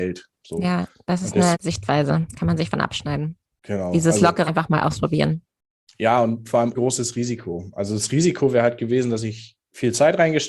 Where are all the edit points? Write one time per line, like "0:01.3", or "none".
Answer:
0:01.5
0:02.7
0:04.5
0:06.7